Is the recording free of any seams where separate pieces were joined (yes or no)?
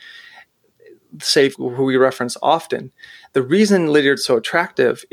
no